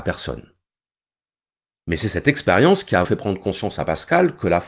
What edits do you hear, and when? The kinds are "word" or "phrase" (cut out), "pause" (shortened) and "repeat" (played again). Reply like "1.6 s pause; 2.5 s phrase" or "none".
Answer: 3.0 s word